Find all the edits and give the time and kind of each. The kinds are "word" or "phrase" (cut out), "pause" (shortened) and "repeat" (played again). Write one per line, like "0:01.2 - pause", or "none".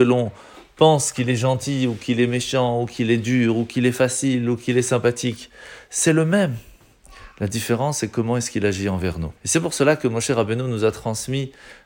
0:09.4 - pause